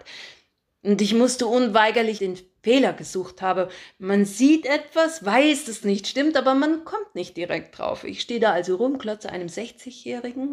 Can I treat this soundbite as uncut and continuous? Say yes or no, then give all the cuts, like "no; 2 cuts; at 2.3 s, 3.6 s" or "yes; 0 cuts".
no; 2 cuts; at 2.2 s, 5.8 s